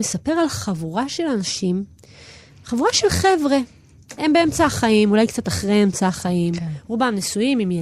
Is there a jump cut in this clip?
no; 0 cuts

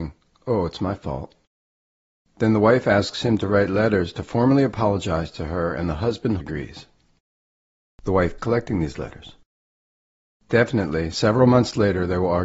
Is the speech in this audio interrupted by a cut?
yes; 2 cuts; at 6.4 s, 8.4 s

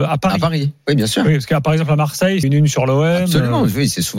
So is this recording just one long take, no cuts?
no; 1 cut; at 2.4 s

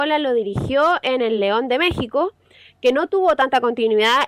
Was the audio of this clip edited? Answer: no; 0 cuts

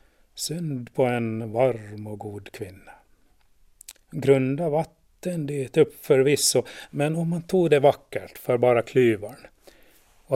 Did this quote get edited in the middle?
yes; 1 cut; at 4.0 s

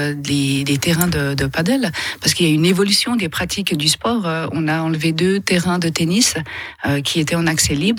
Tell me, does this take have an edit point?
no; 0 cuts

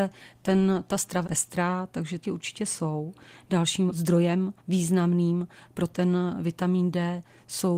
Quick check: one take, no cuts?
no; 4 cuts; at 1.2 s, 2.2 s, 3.9 s, 4.6 s

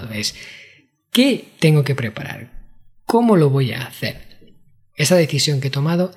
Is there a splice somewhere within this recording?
no; 0 cuts

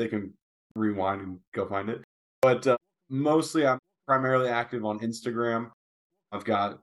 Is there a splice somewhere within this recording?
no; 0 cuts

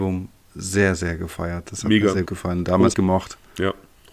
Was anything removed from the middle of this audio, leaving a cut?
yes; 2 cuts; at 2.3 s, 2.9 s

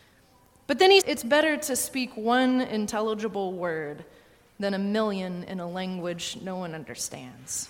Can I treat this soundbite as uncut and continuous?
no; 1 cut; at 1.0 s

